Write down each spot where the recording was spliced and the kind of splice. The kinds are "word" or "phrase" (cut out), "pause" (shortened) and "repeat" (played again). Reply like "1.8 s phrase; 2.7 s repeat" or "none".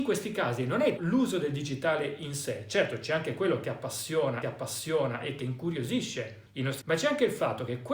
1.0 s word; 4.4 s repeat; 5.4 s phrase; 6.5 s pause; 6.8 s word

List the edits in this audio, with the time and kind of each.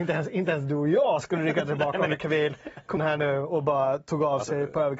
2.1 s word; 3.0 s word

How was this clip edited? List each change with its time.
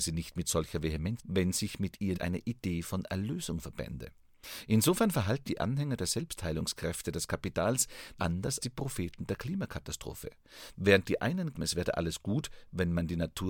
1.2 s word; 2.1 s word; 5.4 s word; 8.2 s word; 8.6 s word; 11.5 s word

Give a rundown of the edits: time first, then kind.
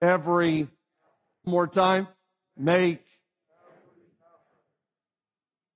1.5 s phrase

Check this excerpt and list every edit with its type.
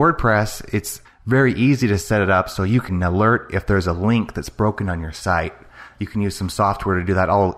1.0 s pause; 2.9 s word

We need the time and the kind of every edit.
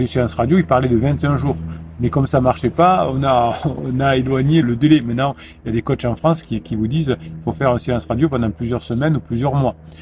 4.6 s word

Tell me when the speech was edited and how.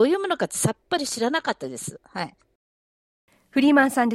none

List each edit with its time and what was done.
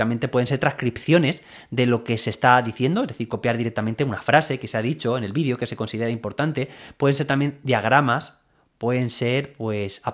none

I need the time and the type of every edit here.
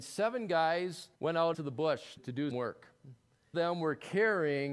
1.1 s pause; 1.5 s word; 2.2 s word; 2.5 s word; 3.5 s phrase

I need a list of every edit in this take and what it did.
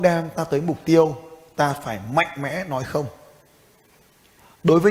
none

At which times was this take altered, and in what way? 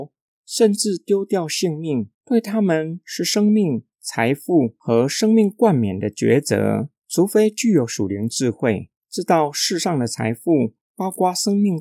2.1 s pause; 3.9 s pause; 7.0 s pause

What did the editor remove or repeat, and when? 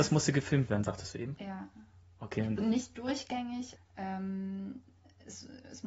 2.6 s word; 3.8 s word

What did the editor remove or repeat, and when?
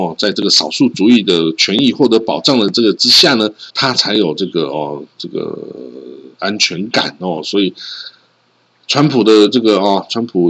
3.7 s pause

